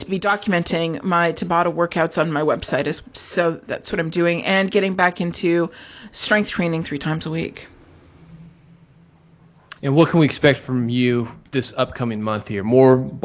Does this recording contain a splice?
yes; 4 cuts; at 3.0 s, 3.6 s, 9.8 s, 11.4 s

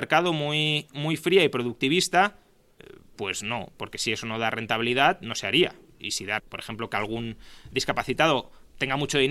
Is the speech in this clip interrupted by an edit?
yes; 2 cuts; at 6.4 s, 7.7 s

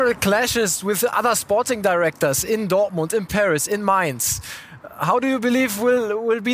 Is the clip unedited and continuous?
yes; 0 cuts

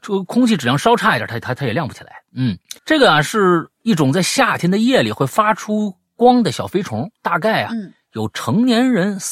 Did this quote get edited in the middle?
yes; 1 cut; at 2.8 s

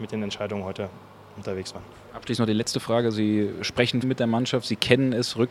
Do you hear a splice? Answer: yes; 1 cut; at 4.0 s

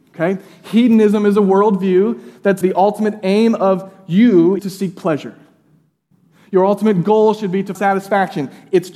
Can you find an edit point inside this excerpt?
yes; 3 cuts; at 2.6 s, 4.6 s, 7.7 s

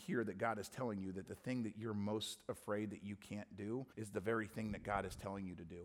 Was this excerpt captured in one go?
no; 1 cut; at 3.9 s

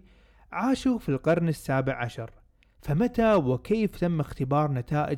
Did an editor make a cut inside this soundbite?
no; 0 cuts

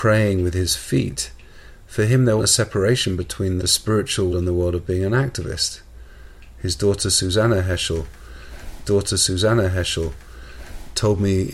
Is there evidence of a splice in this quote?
yes; 4 cuts; at 2.4 s, 3.6 s, 4.3 s, 8.8 s

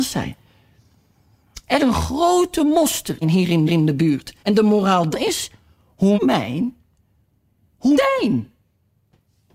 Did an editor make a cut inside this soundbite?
yes; 7 cuts; at 1.8 s, 3.2 s, 3.7 s, 4.4 s, 5.1 s, 6.2 s, 7.9 s

